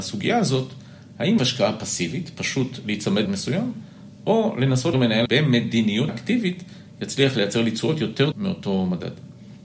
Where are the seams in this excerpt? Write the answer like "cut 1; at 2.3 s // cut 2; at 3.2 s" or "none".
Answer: cut 1; at 1.4 s // cut 2; at 3.3 s // cut 3; at 4.9 s // cut 4; at 5.3 s // cut 5; at 6.1 s // cut 6; at 8.3 s